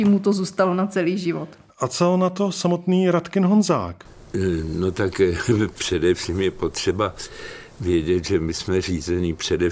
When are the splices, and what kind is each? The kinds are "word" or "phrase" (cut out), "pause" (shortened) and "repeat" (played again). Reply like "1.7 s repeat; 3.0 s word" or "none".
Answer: none